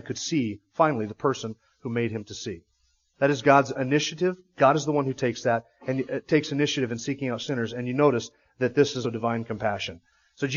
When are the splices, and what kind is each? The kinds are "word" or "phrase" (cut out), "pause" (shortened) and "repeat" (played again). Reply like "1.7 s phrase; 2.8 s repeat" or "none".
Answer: 9.0 s word